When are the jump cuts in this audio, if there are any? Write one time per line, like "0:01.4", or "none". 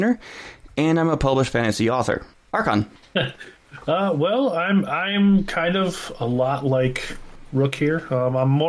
none